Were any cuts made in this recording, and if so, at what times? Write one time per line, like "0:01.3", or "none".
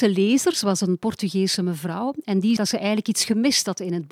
0:02.6